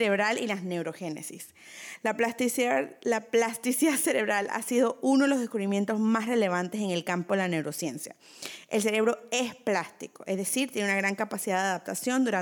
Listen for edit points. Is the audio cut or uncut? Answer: uncut